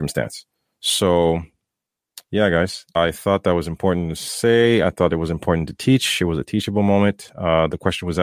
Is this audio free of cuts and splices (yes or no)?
no